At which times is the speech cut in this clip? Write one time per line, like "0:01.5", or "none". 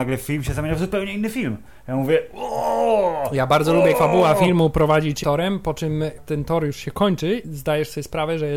0:03.9
0:05.2
0:06.2
0:07.4